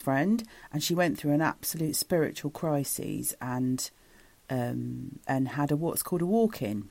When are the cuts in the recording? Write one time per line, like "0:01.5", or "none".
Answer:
0:05.2